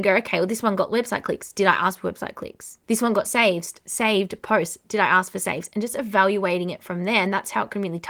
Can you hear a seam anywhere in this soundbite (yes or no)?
yes